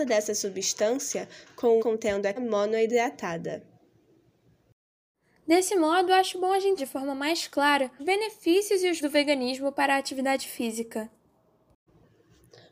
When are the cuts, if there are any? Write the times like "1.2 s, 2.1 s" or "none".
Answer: 1.8 s, 2.4 s, 6.8 s, 8.0 s, 9.0 s